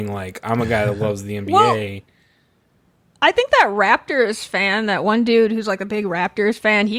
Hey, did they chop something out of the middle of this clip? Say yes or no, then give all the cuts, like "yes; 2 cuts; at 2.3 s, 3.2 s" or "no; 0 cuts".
no; 0 cuts